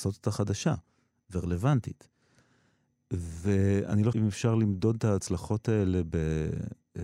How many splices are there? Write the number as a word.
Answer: one